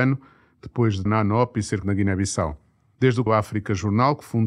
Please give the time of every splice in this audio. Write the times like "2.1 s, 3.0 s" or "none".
1.1 s, 1.8 s, 3.3 s